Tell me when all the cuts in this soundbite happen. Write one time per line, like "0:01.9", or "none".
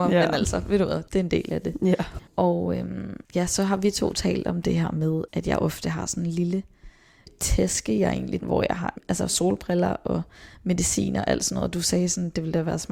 0:01.1
0:02.3
0:03.2
0:08.4

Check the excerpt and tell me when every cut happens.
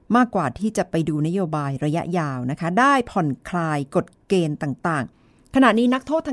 0:05.1

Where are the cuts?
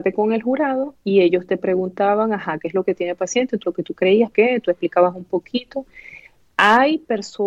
0:03.6
0:04.3

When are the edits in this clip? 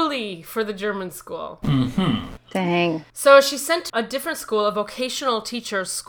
0:03.1
0:03.9

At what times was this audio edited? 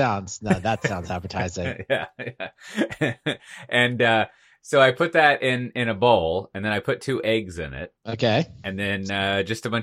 0:08.0

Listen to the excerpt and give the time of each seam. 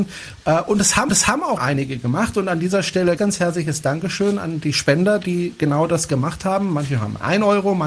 0:01.1
0:01.6
0:03.2

